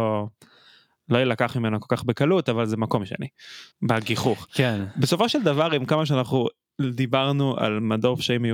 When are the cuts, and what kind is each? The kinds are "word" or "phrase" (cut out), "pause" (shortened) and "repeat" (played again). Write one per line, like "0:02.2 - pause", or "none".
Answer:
0:03.7 - pause